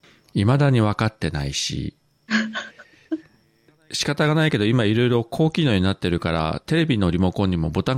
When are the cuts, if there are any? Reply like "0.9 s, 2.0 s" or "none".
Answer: none